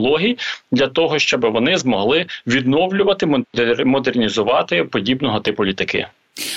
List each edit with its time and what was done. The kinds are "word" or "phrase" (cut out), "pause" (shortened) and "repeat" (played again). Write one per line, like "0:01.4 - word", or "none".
none